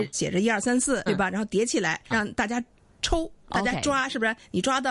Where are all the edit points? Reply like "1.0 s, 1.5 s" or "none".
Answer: 1.1 s, 2.1 s